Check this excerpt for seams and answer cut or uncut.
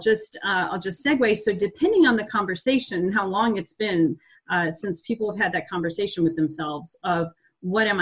uncut